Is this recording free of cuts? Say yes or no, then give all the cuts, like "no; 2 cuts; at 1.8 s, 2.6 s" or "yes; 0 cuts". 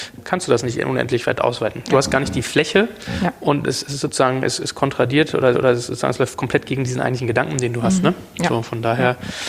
no; 1 cut; at 5.5 s